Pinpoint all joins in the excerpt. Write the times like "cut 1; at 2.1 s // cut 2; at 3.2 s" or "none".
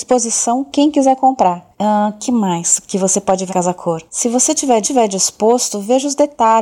cut 1; at 1.7 s // cut 2; at 3.5 s // cut 3; at 4.1 s // cut 4; at 4.8 s